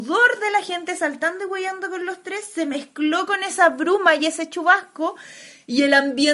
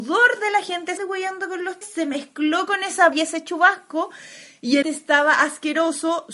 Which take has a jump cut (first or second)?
second